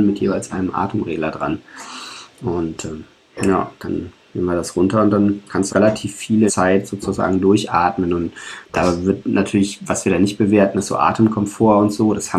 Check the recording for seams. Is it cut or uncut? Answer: cut